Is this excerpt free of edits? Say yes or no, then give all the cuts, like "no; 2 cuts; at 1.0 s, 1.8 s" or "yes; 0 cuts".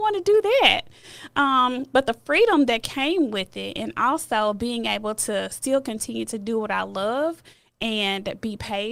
yes; 0 cuts